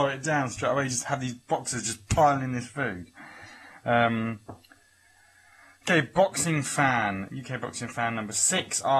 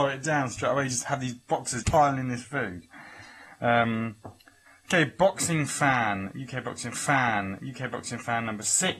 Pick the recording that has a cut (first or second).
second